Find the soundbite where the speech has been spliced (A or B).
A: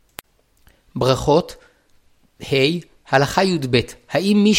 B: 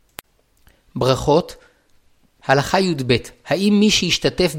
B